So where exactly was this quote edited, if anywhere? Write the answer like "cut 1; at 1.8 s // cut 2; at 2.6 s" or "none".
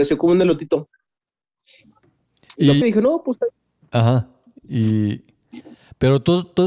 cut 1; at 2.8 s